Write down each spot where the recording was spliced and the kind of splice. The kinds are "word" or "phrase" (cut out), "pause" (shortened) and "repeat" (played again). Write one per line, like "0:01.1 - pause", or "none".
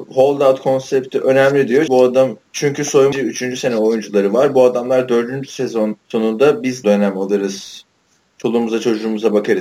0:01.9 - word
0:02.5 - pause
0:03.1 - phrase
0:06.0 - pause
0:06.8 - phrase